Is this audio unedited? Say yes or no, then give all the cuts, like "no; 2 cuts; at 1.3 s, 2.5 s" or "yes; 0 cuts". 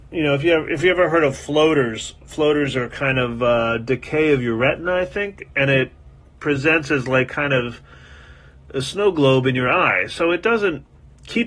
yes; 0 cuts